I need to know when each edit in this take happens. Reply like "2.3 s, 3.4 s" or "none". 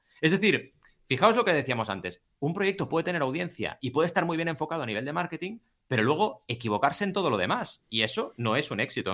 none